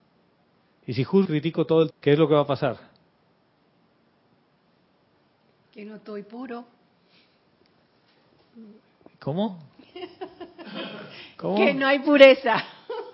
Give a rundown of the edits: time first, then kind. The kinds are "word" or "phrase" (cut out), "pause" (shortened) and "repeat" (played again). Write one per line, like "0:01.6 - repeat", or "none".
0:01.2 - word
0:01.9 - word